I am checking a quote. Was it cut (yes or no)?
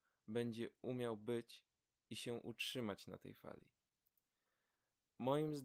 no